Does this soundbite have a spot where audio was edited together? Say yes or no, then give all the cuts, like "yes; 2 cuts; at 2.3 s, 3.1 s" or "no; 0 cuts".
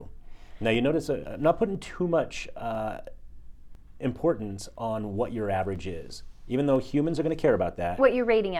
no; 0 cuts